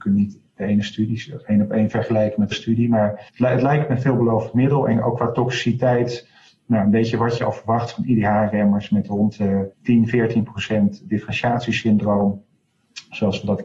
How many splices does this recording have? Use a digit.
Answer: 4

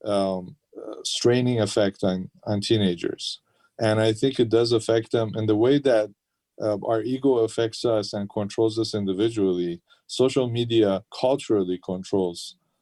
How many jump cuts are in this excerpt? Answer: 1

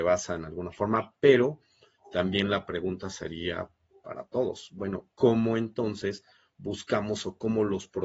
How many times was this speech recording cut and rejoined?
1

